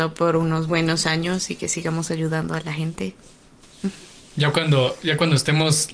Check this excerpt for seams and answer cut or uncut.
uncut